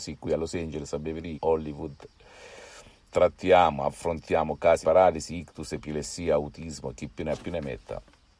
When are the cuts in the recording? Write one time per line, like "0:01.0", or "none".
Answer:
0:01.3
0:04.8

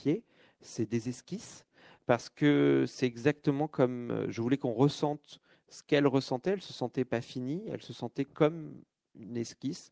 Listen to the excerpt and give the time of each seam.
none

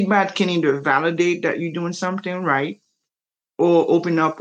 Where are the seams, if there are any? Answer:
none

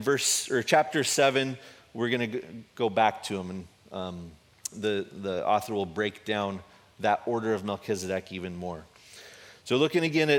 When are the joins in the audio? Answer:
none

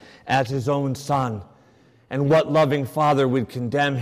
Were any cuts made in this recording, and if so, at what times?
none

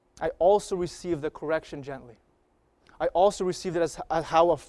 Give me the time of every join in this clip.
none

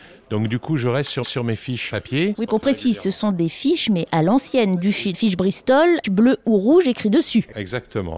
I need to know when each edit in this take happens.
0:01.2
0:01.9
0:02.5
0:05.1
0:06.0

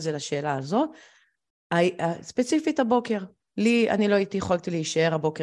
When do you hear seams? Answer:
0:03.5

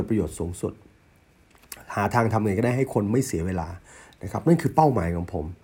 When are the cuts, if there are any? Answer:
none

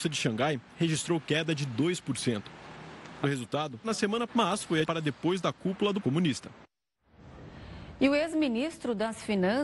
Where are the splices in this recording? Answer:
0:03.2
0:03.8
0:04.3
0:04.8
0:06.0

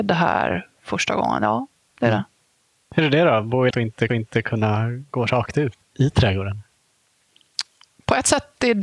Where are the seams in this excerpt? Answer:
0:03.7
0:04.1
0:05.8

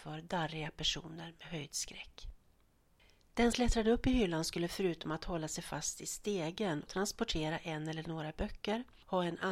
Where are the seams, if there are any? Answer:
0:03.5
0:06.9

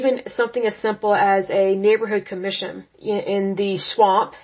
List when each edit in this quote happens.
0:02.9

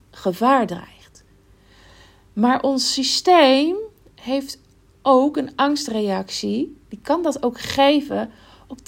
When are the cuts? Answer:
none

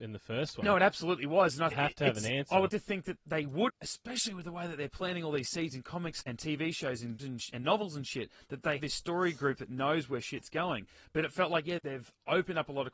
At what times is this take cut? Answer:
0:01.7
0:02.7
0:03.2
0:03.7
0:06.2
0:07.2
0:08.8
0:11.8

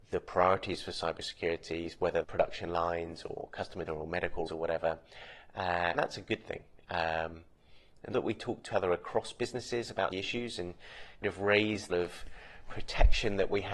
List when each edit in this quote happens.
0:02.2
0:03.9
0:04.5
0:05.9
0:08.1
0:08.7
0:10.1
0:11.2
0:11.9

